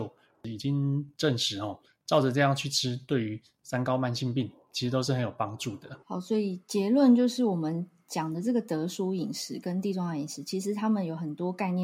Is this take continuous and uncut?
no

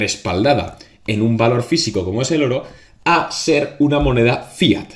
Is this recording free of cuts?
yes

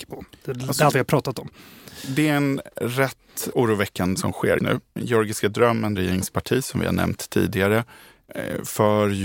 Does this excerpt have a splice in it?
yes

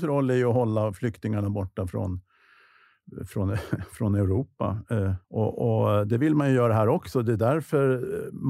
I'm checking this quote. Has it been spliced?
yes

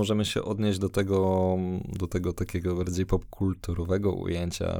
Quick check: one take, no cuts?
yes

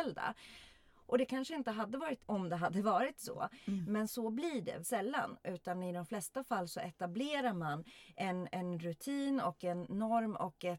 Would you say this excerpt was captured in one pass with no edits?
no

